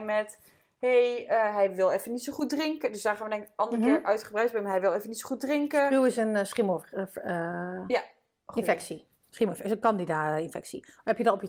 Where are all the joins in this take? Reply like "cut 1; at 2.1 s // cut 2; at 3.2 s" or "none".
none